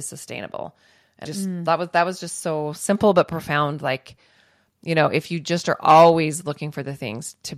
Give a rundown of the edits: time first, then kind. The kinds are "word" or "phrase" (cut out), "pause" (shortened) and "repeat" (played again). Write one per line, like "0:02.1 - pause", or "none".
0:01.2 - word